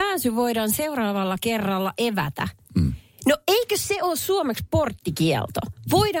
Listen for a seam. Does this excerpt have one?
no; 0 cuts

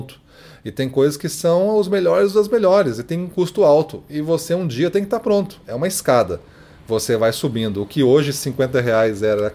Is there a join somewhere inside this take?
no; 0 cuts

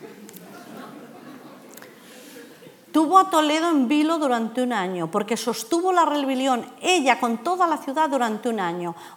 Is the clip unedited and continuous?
yes; 0 cuts

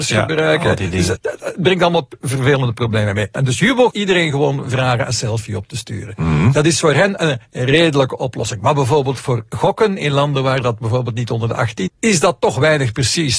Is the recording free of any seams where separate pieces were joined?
no; 3 cuts; at 1.2 s, 3.9 s, 11.9 s

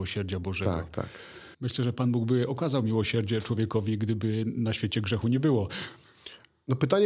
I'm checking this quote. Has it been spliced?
yes; 1 cut; at 1.5 s

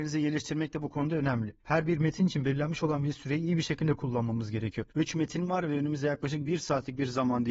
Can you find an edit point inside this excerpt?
yes; 2 cuts; at 1.6 s, 4.9 s

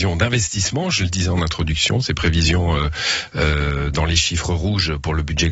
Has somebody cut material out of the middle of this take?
no; 0 cuts

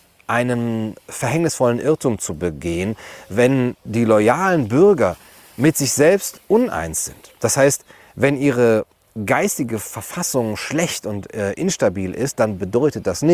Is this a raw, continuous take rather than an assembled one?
yes; 0 cuts

